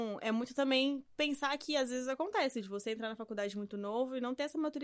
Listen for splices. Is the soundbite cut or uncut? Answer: uncut